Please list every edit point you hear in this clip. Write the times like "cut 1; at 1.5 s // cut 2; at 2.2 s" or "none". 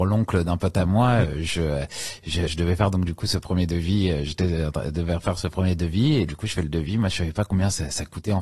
cut 1; at 2.5 s // cut 2; at 6.3 s

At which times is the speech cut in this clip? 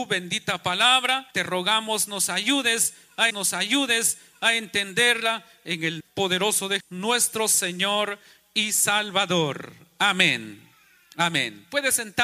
cut 1; at 1.3 s // cut 2; at 3.3 s // cut 3; at 6.0 s // cut 4; at 6.8 s

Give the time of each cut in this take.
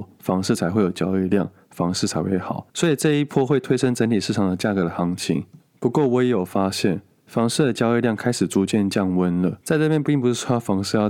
cut 1; at 2.7 s // cut 2; at 9.6 s

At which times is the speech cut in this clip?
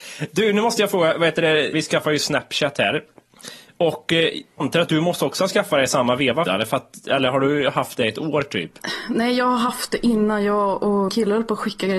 cut 1; at 4.6 s // cut 2; at 6.5 s // cut 3; at 11.1 s

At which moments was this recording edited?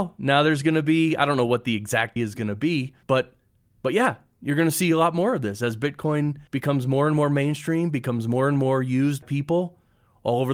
cut 1; at 2.2 s // cut 2; at 3.0 s // cut 3; at 6.5 s // cut 4; at 9.2 s

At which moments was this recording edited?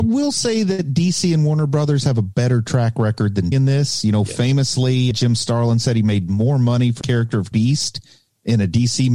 cut 1; at 3.5 s // cut 2; at 5.1 s // cut 3; at 7.0 s // cut 4; at 7.5 s

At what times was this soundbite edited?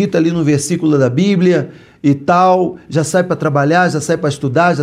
none

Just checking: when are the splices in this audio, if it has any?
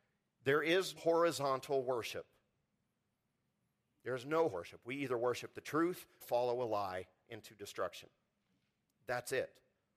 cut 1; at 1.0 s // cut 2; at 4.5 s // cut 3; at 6.2 s

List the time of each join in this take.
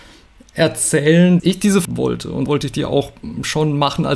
cut 1; at 1.4 s // cut 2; at 1.8 s // cut 3; at 2.5 s

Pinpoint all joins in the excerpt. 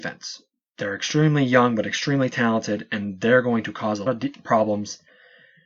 cut 1; at 4.1 s

